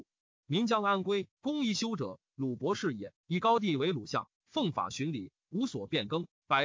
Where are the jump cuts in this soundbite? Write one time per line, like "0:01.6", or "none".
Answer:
0:01.3
0:03.2
0:04.4